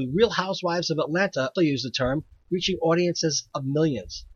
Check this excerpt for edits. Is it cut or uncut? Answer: cut